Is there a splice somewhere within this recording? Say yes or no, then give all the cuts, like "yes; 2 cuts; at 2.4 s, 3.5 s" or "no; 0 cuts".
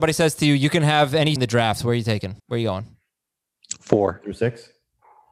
yes; 2 cuts; at 1.4 s, 2.4 s